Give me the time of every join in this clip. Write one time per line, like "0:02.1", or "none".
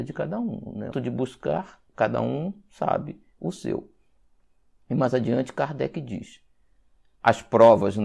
0:00.9
0:01.9

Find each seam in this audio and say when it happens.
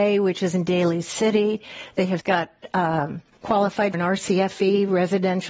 0:02.2
0:03.9

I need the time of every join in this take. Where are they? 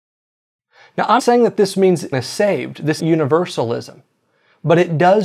0:01.2
0:02.1
0:03.0

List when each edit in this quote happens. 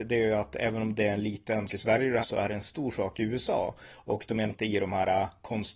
0:01.7
0:02.2
0:04.5

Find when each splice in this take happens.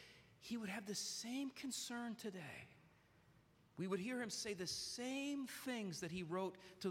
none

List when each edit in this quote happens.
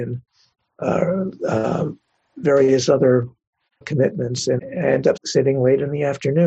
0:03.8
0:04.6
0:05.2

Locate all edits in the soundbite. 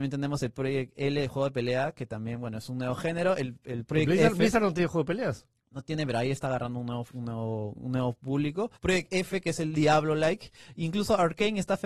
0:08.8

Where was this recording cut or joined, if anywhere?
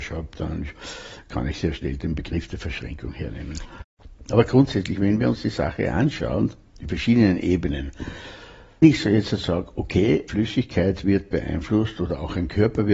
0:08.8
0:10.3

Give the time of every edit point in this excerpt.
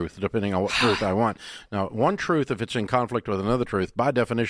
none

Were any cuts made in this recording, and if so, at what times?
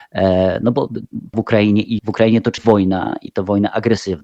0:01.3
0:02.0
0:02.6

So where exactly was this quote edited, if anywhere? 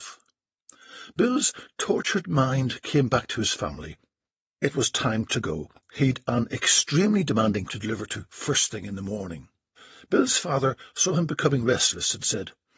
0:07.7
0:09.8

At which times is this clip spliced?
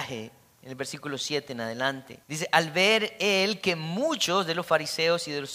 0:02.2

